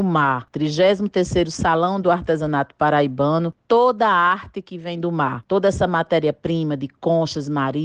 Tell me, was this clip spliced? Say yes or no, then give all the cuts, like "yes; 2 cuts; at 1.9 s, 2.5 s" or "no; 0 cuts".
no; 0 cuts